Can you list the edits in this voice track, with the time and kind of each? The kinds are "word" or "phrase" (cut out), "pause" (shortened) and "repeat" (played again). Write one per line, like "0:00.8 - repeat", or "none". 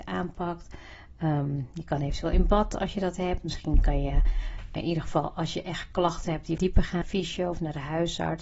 0:04.8 - word
0:06.6 - word
0:07.0 - word